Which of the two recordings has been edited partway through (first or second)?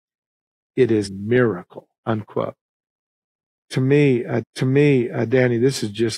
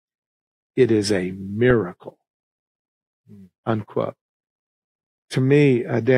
first